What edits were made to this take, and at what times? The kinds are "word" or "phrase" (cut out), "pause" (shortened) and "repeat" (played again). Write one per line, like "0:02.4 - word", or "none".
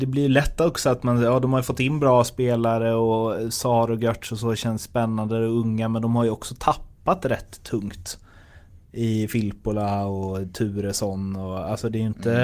none